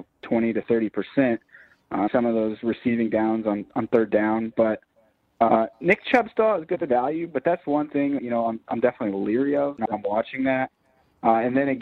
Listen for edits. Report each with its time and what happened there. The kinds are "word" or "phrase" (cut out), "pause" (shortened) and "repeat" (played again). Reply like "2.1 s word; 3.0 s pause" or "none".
2.1 s word; 5.7 s pause; 8.2 s word

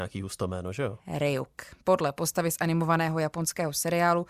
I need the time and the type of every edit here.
none

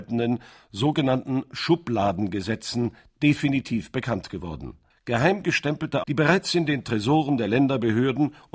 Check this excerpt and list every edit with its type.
4.9 s pause; 6.0 s phrase

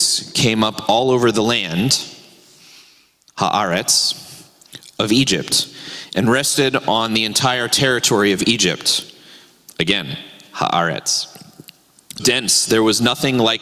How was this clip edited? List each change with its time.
12.2 s word

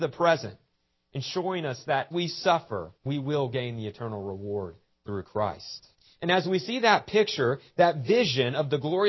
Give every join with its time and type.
2.1 s word; 3.0 s pause; 5.9 s pause

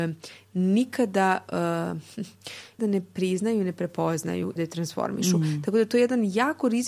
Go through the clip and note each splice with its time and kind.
2.8 s word; 4.6 s phrase

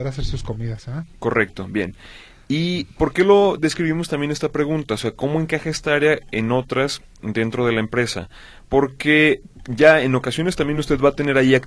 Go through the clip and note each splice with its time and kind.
none

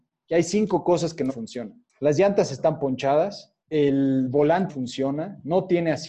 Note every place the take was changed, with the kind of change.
1.3 s word; 1.9 s pause; 3.6 s pause; 4.7 s word

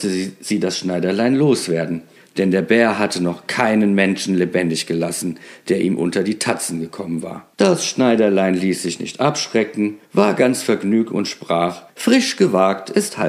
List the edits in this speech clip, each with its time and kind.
2.2 s pause; 7.5 s pause; 10.0 s pause; 11.9 s pause

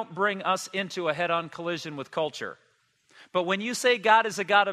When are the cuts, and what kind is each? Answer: none

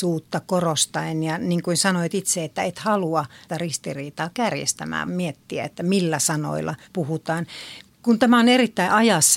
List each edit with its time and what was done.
3.5 s phrase; 5.1 s word; 6.8 s pause

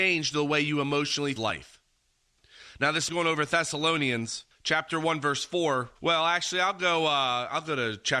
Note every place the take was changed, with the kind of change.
1.4 s phrase; 3.1 s phrase; 4.5 s pause; 6.0 s pause

